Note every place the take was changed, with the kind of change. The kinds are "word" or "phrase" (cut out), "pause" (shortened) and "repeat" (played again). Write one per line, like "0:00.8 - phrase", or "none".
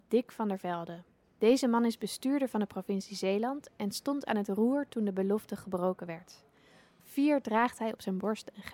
none